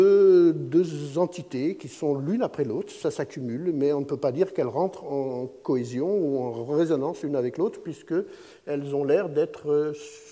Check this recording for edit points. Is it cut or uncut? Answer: uncut